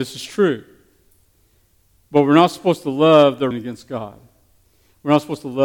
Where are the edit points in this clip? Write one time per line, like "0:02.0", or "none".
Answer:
0:03.5